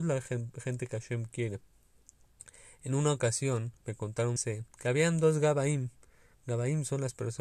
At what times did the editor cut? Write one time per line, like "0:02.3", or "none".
0:03.8
0:04.4
0:04.7